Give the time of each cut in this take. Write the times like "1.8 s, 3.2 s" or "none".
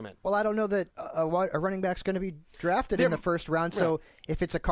0.9 s

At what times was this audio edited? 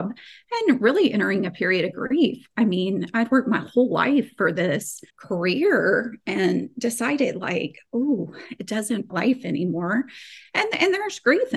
5.1 s, 9.1 s

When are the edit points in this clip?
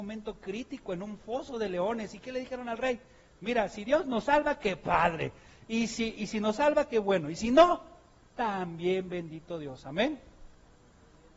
6.2 s

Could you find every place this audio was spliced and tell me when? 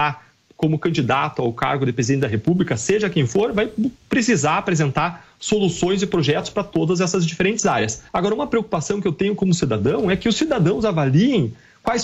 8.1 s

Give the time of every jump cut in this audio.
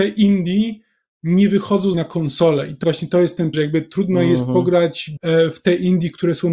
1.9 s, 2.8 s, 3.5 s, 5.2 s

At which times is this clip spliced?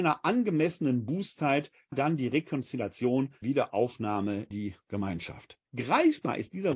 1.9 s, 3.4 s, 4.5 s, 5.7 s

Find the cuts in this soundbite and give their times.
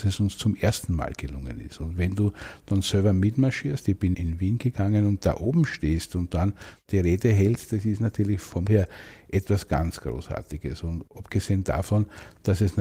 4.1 s, 8.7 s

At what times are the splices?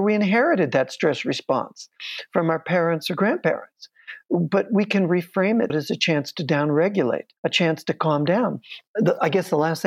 5.7 s, 7.4 s, 8.9 s

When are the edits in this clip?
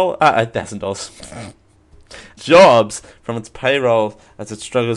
2.4 s

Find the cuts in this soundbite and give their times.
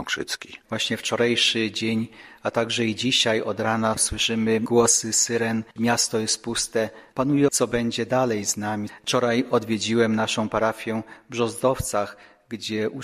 7.5 s

